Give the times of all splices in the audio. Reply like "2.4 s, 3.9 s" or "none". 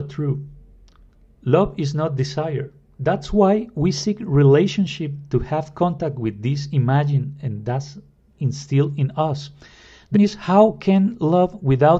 10.1 s